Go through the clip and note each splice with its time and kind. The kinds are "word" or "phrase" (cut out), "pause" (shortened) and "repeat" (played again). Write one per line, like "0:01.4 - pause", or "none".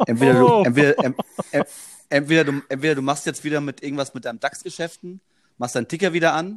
none